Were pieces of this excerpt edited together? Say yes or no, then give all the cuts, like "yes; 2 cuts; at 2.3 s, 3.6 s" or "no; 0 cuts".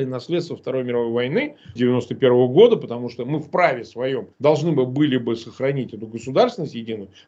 yes; 2 cuts; at 1.8 s, 4.3 s